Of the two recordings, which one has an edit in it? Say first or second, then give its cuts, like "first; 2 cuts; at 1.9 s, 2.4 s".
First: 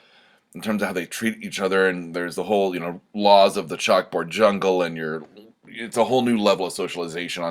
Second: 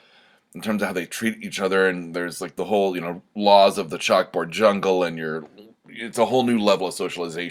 first; 1 cut; at 2.3 s